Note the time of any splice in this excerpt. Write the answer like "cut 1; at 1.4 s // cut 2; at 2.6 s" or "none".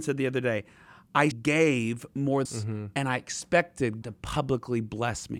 cut 1; at 1.3 s // cut 2; at 2.5 s // cut 3; at 4.0 s